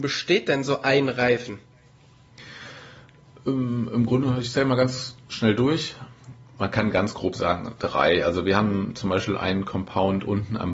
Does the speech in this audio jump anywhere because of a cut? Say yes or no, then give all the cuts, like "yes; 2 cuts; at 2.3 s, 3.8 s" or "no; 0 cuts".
no; 0 cuts